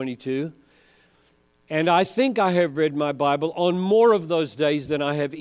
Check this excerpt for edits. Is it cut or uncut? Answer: uncut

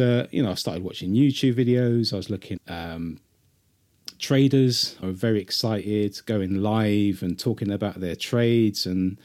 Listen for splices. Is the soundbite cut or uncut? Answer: cut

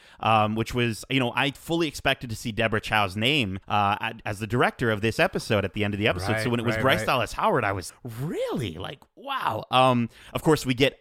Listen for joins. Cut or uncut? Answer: cut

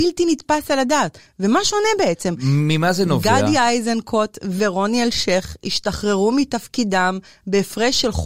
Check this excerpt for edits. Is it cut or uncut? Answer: uncut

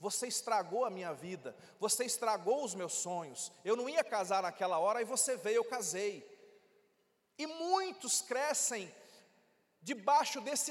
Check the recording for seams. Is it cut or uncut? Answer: uncut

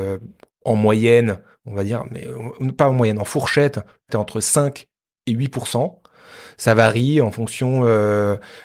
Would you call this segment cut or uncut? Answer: cut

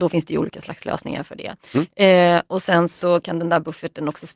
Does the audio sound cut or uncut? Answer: uncut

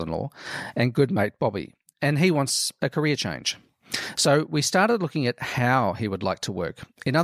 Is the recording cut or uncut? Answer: uncut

